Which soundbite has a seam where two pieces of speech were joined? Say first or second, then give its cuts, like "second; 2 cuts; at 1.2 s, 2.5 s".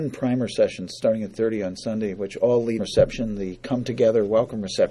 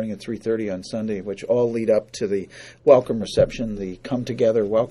first; 2 cuts; at 1.3 s, 2.8 s